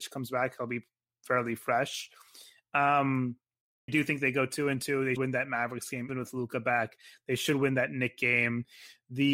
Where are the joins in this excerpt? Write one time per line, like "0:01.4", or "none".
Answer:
0:03.9
0:05.2
0:06.1